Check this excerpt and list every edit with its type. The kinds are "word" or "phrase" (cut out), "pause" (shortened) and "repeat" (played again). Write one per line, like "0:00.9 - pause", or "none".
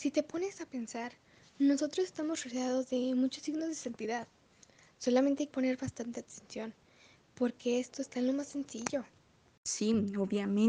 0:05.5 - phrase